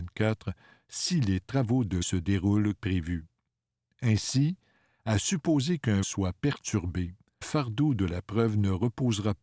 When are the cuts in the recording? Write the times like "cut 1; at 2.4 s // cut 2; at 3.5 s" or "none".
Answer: cut 1; at 2.0 s // cut 2; at 2.8 s // cut 3; at 6.0 s // cut 4; at 7.4 s